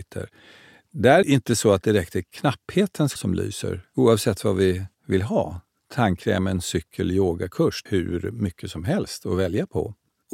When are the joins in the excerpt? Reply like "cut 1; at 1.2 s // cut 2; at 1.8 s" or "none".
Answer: cut 1; at 1.2 s // cut 2; at 3.2 s // cut 3; at 7.9 s